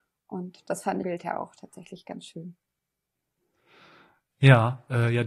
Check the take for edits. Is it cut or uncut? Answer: cut